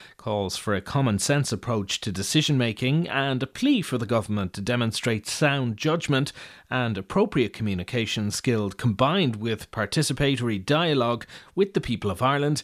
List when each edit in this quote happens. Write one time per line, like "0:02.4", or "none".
none

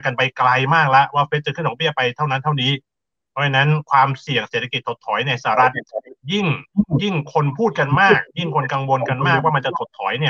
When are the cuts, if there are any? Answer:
none

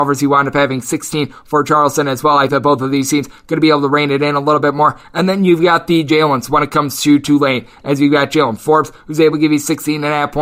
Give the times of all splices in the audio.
0:02.5

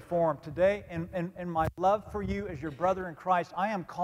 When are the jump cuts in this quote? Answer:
none

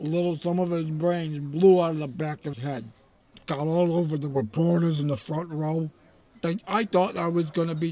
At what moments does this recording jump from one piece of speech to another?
0:02.5
0:06.6

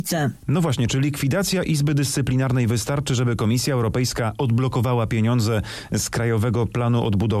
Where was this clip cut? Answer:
none

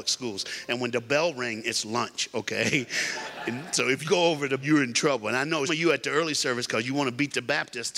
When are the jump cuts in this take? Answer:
0:04.0
0:04.6
0:05.7

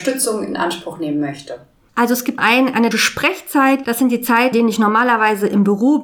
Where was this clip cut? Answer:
0:02.4
0:02.9
0:04.5

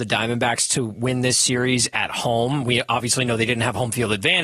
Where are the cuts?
none

